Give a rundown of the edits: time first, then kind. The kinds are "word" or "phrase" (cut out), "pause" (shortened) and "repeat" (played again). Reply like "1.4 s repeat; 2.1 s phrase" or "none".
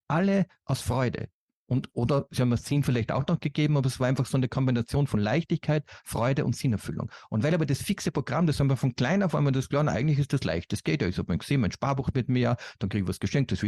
none